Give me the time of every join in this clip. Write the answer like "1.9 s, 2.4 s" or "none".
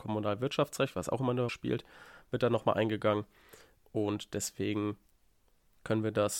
1.5 s

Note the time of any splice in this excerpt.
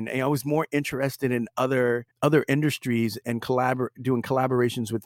2.1 s

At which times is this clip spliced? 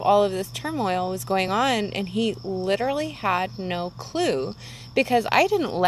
none

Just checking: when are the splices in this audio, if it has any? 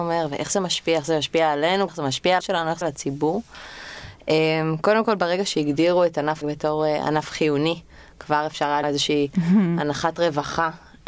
1.9 s, 2.4 s, 2.8 s, 6.4 s, 8.8 s

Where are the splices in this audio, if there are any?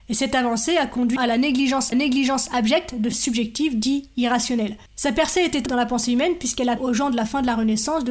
1.2 s, 1.9 s, 3.1 s, 4.9 s, 5.7 s, 6.8 s

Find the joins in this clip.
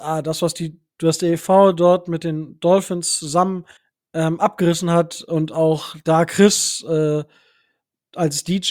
3.8 s

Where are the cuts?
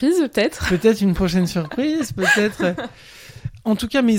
none

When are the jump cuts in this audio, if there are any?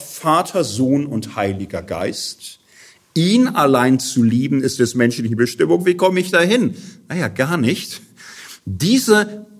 none

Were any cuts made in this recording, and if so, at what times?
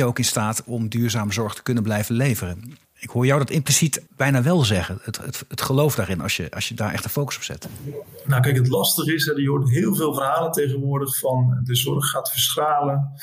2.8 s, 4.1 s

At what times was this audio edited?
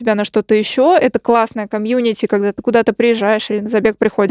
none

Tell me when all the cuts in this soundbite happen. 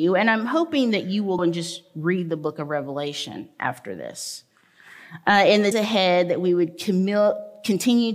1.4 s, 5.7 s

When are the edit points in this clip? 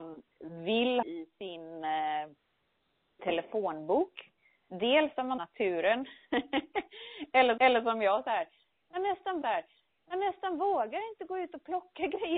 1.0 s, 3.2 s, 5.4 s, 7.6 s, 9.4 s

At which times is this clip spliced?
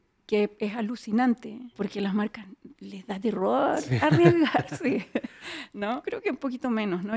1.7 s, 2.7 s, 6.0 s

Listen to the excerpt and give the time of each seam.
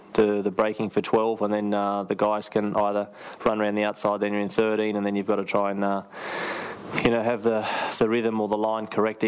none

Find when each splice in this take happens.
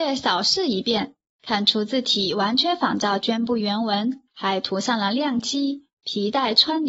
4.3 s

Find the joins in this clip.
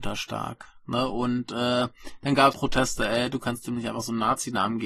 2.5 s

